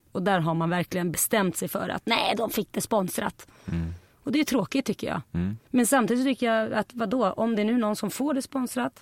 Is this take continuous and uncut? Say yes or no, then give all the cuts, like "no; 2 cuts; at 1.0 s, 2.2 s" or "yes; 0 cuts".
no; 1 cut; at 5.6 s